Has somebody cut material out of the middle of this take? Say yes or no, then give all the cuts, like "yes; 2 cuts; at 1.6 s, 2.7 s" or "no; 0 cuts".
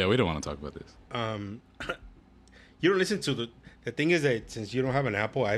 no; 0 cuts